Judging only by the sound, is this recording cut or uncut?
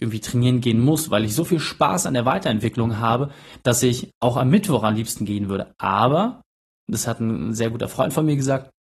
uncut